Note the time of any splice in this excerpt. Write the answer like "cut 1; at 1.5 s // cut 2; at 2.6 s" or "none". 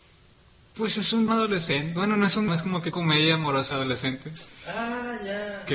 cut 1; at 1.3 s // cut 2; at 2.5 s // cut 3; at 2.9 s // cut 4; at 3.7 s